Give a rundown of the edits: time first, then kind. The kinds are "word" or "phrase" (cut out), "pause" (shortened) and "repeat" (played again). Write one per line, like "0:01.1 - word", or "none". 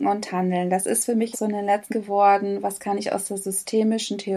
0:01.3 - phrase
0:01.9 - phrase